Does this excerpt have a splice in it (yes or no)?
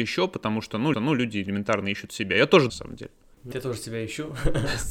yes